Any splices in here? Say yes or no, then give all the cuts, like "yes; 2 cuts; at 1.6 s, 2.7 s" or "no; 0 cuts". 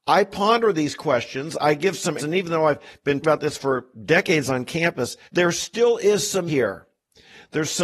yes; 4 cuts; at 2.2 s, 3.2 s, 5.2 s, 6.5 s